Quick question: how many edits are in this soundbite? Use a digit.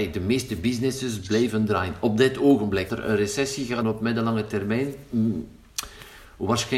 2